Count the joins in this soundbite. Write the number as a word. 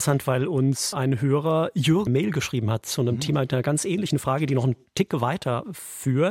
one